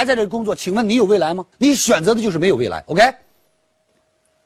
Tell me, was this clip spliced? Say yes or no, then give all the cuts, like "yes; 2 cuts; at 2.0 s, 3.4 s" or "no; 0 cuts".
yes; 1 cut; at 1.5 s